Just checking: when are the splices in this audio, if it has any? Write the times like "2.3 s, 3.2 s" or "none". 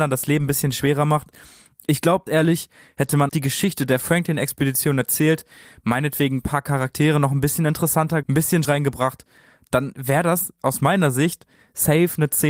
2.3 s, 3.3 s, 8.2 s, 8.6 s